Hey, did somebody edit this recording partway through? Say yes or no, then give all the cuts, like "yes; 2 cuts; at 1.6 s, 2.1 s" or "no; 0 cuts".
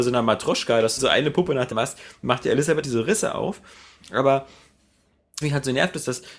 yes; 4 cuts; at 1.0 s, 1.7 s, 2.8 s, 5.4 s